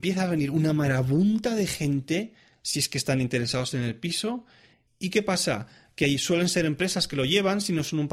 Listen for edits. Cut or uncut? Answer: uncut